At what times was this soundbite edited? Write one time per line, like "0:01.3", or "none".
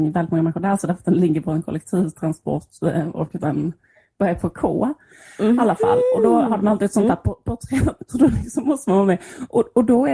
none